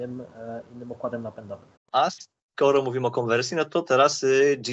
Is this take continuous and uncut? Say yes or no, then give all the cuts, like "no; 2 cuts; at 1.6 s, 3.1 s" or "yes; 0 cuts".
no; 1 cut; at 1.8 s